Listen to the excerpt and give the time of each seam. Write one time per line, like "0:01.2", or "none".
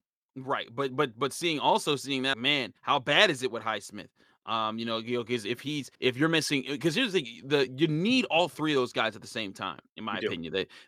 0:02.3
0:02.8
0:05.9